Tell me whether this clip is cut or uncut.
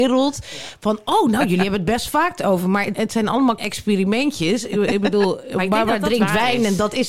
cut